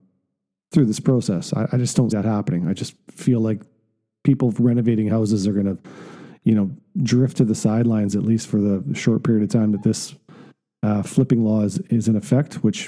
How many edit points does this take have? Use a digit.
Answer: 1